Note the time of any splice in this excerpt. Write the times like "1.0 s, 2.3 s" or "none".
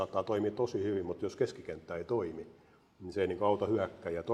none